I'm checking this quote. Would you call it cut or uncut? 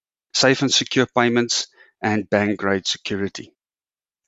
uncut